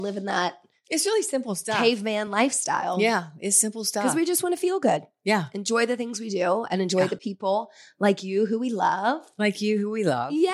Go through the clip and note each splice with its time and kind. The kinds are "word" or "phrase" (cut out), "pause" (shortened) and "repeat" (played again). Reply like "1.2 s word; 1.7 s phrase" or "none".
none